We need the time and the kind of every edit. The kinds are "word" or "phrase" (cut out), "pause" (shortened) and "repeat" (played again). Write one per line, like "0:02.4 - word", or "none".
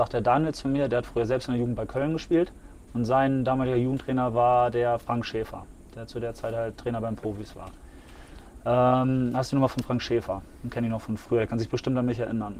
none